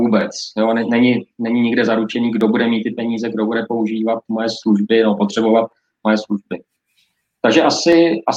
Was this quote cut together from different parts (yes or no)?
no